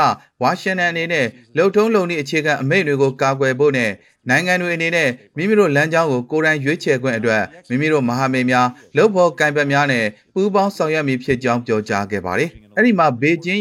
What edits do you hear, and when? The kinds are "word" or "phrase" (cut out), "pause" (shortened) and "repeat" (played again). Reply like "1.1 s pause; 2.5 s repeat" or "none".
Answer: none